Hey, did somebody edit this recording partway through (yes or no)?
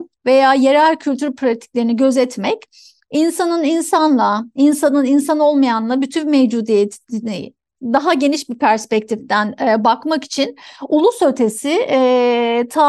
no